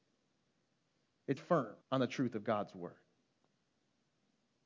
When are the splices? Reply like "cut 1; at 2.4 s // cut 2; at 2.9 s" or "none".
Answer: cut 1; at 1.4 s // cut 2; at 1.8 s